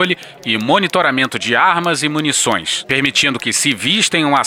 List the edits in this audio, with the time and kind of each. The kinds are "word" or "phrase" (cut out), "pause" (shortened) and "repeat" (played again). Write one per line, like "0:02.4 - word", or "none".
none